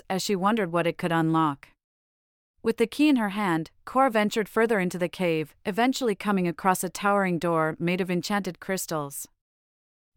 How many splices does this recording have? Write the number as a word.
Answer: zero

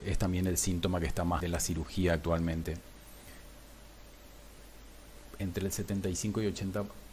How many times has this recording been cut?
one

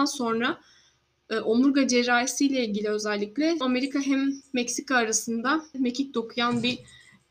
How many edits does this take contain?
two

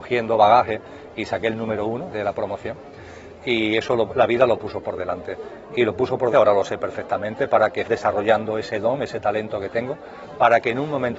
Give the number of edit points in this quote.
three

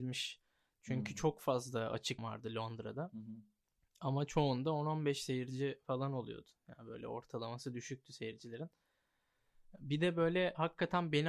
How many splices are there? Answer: one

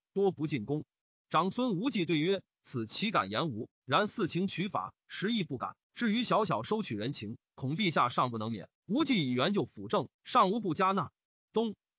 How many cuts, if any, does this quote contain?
three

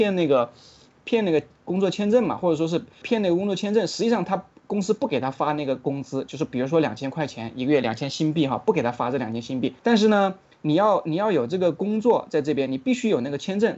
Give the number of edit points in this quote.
two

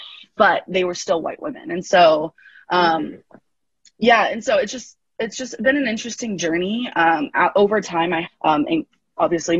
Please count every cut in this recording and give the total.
one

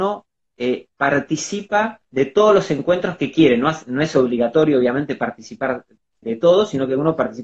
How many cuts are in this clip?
two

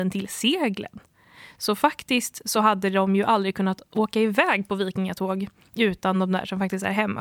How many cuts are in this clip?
zero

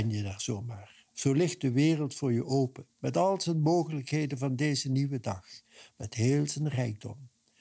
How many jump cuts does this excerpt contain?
two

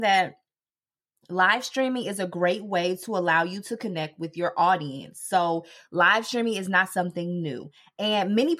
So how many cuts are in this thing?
zero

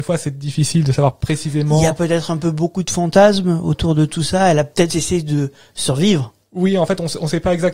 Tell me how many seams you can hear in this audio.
one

